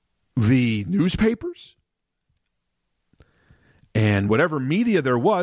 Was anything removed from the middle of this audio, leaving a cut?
no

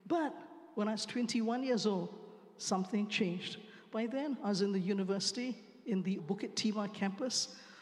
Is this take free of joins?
no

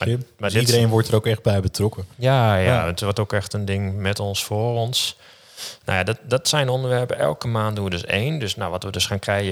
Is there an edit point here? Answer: yes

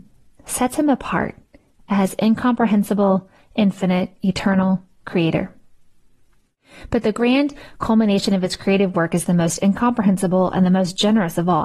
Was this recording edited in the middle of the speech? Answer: no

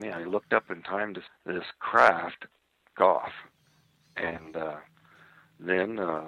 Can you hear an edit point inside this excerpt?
yes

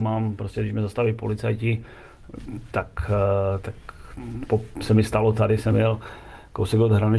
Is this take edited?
no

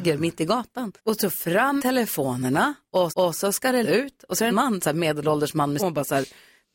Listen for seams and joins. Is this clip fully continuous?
no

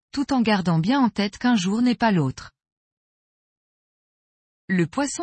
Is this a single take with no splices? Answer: yes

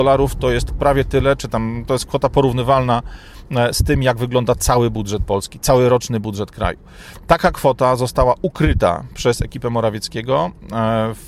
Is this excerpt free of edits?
yes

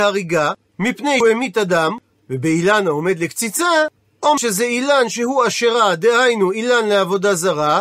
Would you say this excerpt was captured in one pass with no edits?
no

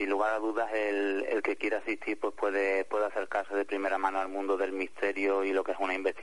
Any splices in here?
no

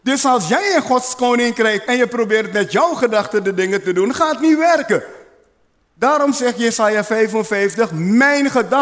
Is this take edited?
yes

